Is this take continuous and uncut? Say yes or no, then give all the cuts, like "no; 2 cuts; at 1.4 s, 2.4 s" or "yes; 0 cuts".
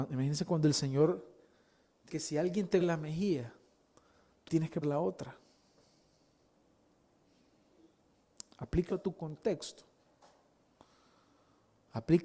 no; 5 cuts; at 2.1 s, 2.8 s, 4.5 s, 4.8 s, 8.9 s